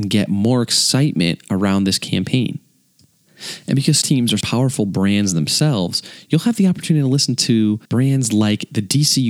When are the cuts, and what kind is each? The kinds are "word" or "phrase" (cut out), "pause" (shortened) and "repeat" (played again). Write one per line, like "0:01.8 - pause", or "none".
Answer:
0:04.0 - word
0:04.4 - word
0:07.8 - pause